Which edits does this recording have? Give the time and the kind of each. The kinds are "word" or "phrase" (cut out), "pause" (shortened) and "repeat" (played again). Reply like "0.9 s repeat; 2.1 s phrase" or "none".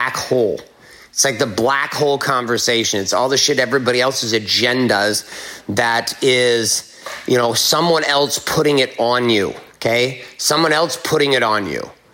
9.7 s pause